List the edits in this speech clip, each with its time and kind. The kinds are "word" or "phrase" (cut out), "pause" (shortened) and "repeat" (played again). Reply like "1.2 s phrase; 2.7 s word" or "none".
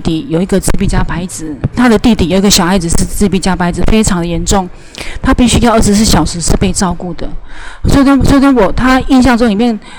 1.7 s phrase; 8.2 s repeat